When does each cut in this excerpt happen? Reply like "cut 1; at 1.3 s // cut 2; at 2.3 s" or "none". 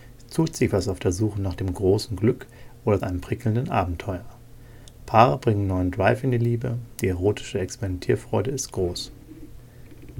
cut 1; at 3.0 s